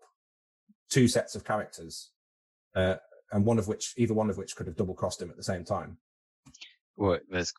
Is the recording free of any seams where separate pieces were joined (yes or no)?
yes